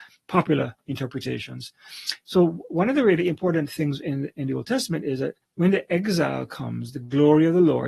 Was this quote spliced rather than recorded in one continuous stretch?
yes; 1 cut; at 5.4 s

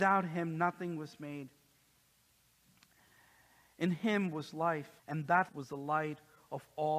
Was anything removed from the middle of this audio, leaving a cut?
yes; 2 cuts; at 5.0 s, 5.5 s

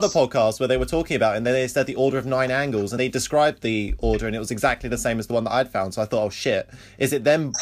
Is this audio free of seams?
no; 1 cut; at 3.0 s

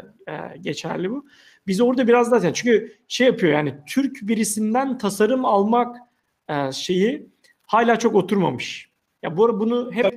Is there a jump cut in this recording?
no; 0 cuts

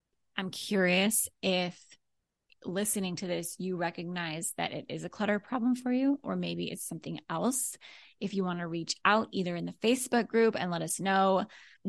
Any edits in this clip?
no; 0 cuts

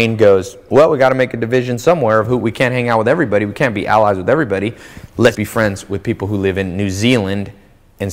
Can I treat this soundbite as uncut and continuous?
no; 1 cut; at 5.3 s

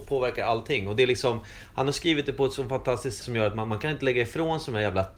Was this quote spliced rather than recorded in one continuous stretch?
yes; 1 cut; at 3.2 s

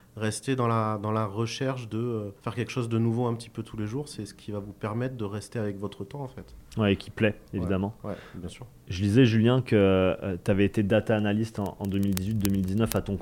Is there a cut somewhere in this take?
yes; 1 cut; at 2.4 s

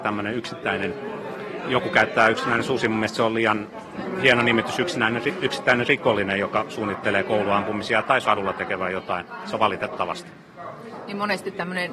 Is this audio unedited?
no; 2 cuts; at 8.2 s, 9.5 s

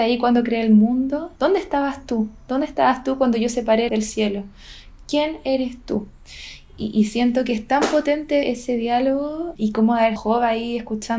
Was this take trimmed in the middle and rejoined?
yes; 5 cuts; at 1.4 s, 3.9 s, 8.4 s, 9.6 s, 10.2 s

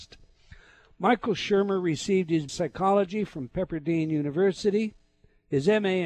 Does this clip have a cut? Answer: yes; 1 cut; at 2.5 s

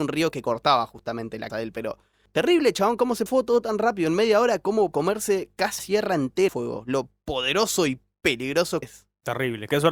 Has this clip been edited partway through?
yes; 6 cuts; at 1.5 s, 3.3 s, 4.9 s, 5.8 s, 6.5 s, 8.8 s

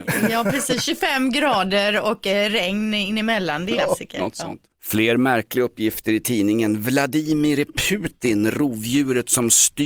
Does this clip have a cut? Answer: yes; 1 cut; at 3.7 s

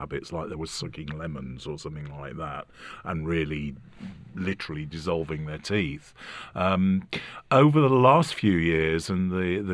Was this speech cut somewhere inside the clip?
no; 0 cuts

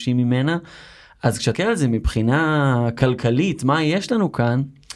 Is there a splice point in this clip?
yes; 1 cut; at 1.5 s

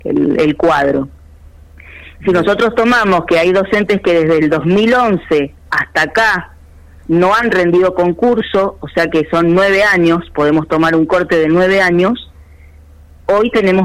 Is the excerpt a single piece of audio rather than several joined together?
yes; 0 cuts

